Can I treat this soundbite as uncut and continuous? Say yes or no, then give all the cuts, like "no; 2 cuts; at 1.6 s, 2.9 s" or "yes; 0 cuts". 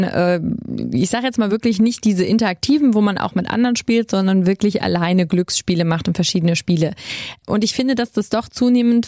yes; 0 cuts